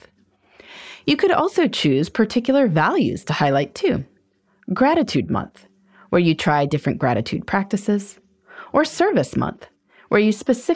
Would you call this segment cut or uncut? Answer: uncut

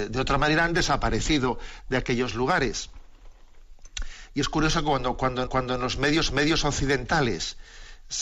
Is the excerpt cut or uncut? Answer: cut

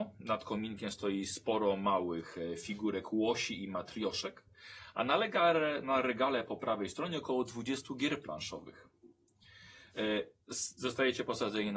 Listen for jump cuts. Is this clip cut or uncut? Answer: uncut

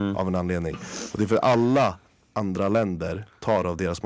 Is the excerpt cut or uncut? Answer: uncut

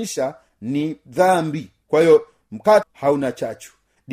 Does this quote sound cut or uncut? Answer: cut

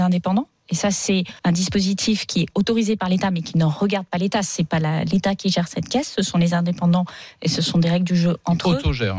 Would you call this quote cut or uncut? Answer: cut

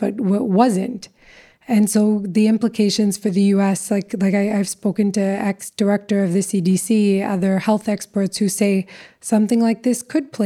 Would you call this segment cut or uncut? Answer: uncut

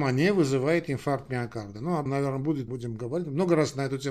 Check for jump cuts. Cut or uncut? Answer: cut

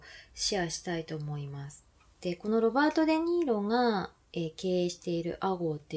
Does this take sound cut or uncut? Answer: cut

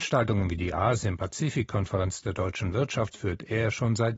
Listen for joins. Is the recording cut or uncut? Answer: cut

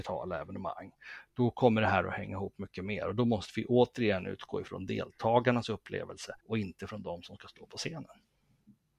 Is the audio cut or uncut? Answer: cut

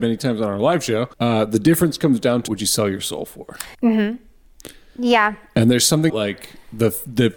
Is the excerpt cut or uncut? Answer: cut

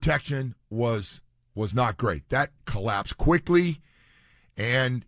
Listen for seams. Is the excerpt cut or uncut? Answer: cut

